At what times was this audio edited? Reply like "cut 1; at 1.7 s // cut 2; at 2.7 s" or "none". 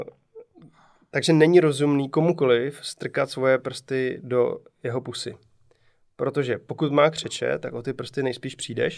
none